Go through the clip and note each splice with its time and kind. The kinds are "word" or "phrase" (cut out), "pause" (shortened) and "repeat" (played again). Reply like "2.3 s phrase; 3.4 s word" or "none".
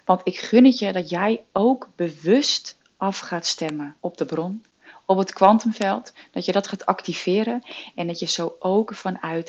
4.0 s pause